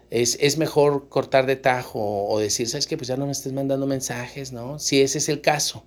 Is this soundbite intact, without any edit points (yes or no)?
yes